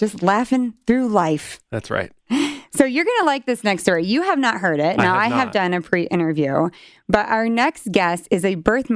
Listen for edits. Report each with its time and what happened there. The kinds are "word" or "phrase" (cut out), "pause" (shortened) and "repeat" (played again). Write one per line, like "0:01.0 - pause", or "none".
none